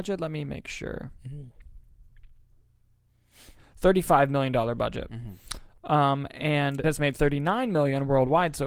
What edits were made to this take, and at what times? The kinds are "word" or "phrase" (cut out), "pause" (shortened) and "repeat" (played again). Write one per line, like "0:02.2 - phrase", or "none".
0:06.8 - word